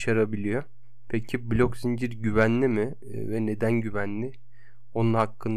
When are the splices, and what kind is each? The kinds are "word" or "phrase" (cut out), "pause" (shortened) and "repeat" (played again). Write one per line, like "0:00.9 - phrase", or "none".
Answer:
none